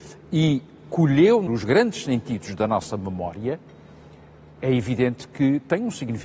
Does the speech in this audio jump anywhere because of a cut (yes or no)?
yes